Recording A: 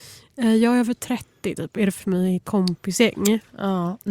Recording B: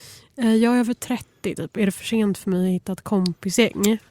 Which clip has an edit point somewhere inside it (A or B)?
A